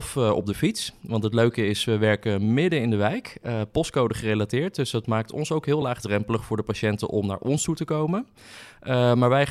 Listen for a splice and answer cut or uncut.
uncut